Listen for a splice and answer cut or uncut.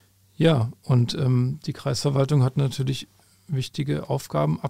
uncut